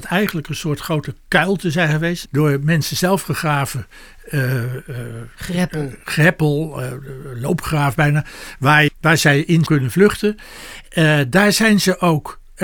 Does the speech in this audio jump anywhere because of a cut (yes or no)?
yes